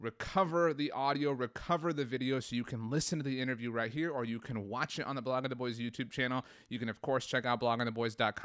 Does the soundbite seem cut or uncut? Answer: uncut